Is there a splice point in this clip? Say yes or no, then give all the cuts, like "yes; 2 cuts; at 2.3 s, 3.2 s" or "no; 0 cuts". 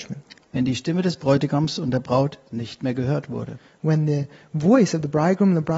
no; 0 cuts